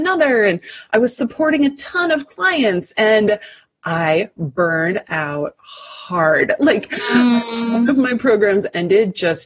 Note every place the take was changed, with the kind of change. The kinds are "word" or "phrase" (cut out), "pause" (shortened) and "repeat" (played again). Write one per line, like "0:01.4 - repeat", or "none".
none